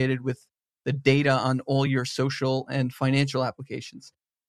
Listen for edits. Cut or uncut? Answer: uncut